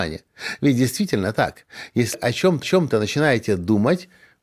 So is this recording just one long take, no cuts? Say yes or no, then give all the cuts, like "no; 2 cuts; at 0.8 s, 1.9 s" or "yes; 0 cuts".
no; 2 cuts; at 2.1 s, 2.6 s